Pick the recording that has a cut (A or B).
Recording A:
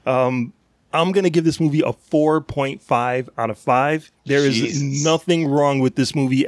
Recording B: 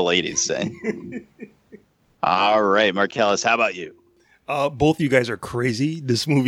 A